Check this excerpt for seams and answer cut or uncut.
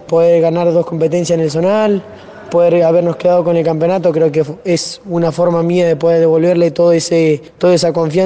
uncut